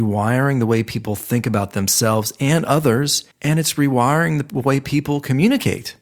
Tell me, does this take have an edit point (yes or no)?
yes